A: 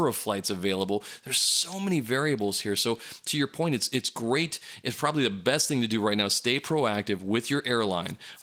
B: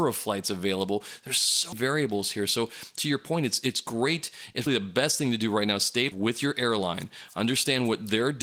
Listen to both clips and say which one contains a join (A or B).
B